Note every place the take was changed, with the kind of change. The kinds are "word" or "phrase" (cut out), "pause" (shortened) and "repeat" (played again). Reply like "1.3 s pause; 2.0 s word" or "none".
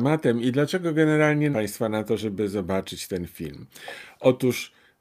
1.5 s word